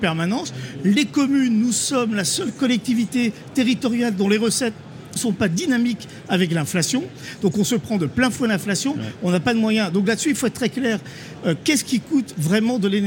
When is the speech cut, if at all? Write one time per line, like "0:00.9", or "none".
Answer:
0:05.2